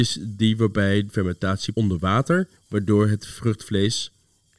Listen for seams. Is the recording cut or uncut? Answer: cut